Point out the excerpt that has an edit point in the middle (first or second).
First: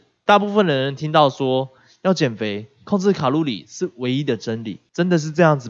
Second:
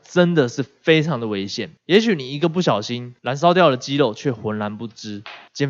second